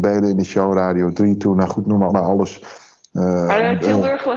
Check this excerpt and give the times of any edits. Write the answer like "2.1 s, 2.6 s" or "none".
2.1 s